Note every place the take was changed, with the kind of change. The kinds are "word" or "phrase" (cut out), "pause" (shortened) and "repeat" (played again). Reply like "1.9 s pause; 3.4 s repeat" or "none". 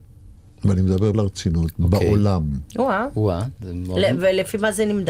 1.1 s word